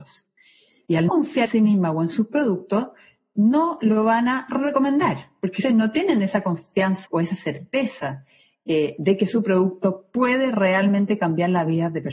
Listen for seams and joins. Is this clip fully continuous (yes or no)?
no